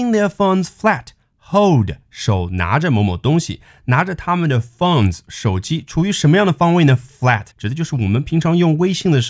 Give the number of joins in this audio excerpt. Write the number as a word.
one